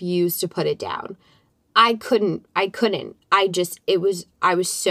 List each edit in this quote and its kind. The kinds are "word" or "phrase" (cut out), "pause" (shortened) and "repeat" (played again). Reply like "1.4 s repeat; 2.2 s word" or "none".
none